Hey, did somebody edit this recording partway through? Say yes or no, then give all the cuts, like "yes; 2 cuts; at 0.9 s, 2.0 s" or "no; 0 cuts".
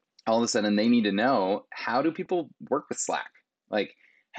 no; 0 cuts